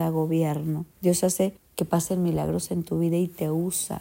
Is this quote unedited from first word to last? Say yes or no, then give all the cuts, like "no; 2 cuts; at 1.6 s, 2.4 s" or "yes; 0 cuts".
no; 2 cuts; at 0.9 s, 1.6 s